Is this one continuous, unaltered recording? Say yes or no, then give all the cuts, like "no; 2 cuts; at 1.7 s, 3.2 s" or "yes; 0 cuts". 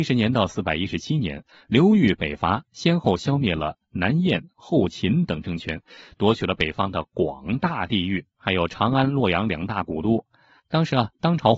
yes; 0 cuts